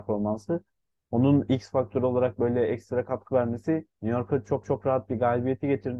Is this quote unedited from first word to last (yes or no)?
no